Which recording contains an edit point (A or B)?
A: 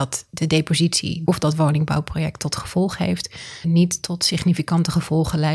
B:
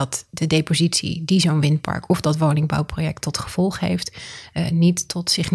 A